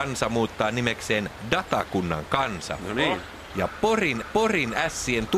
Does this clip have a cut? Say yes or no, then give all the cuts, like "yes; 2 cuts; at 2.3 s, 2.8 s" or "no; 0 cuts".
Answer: yes; 1 cut; at 4.2 s